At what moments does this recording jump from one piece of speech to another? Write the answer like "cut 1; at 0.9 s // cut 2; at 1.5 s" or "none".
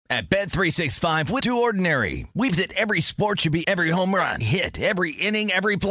cut 1; at 1.4 s // cut 2; at 2.5 s // cut 3; at 3.6 s // cut 4; at 4.4 s